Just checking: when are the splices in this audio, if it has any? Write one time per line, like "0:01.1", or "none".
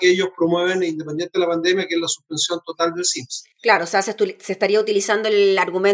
0:03.5